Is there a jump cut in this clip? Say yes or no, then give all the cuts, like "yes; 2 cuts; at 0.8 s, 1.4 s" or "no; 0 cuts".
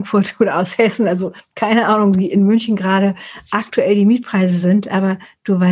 no; 0 cuts